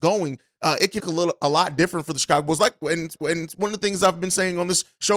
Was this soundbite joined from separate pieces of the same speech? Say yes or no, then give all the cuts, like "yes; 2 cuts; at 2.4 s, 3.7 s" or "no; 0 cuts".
yes; 2 cuts; at 1.0 s, 3.2 s